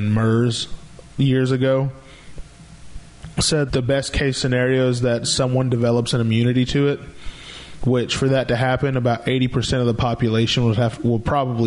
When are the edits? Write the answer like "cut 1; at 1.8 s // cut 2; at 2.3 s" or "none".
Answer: cut 1; at 3.7 s